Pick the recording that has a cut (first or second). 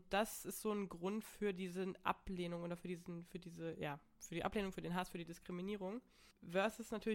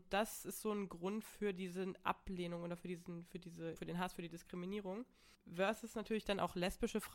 second